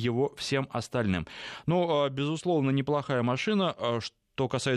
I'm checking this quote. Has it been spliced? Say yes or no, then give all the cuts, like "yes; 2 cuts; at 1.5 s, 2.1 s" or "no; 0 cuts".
no; 0 cuts